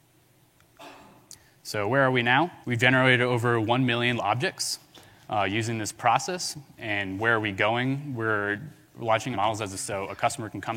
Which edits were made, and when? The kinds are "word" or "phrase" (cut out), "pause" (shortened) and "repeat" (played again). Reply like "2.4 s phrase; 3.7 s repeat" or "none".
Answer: 2.6 s pause; 4.2 s word; 9.3 s word; 9.8 s word

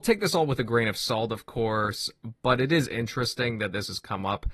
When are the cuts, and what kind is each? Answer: none

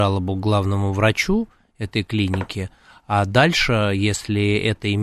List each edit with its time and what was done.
none

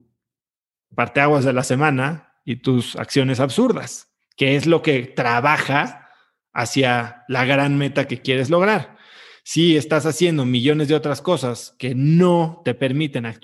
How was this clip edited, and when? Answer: none

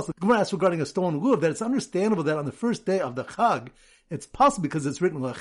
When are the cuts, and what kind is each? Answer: none

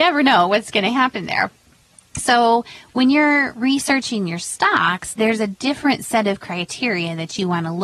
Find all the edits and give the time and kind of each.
none

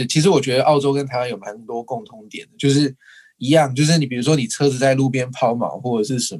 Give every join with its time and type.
none

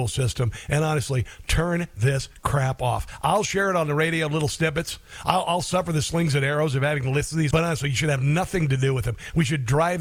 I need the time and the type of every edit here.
7.5 s word

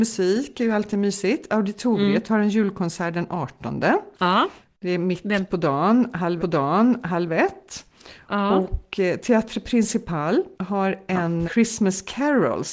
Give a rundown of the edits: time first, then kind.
4.1 s pause; 6.4 s repeat; 10.5 s pause; 11.4 s word

